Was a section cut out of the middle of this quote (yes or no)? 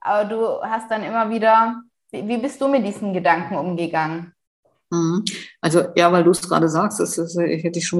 no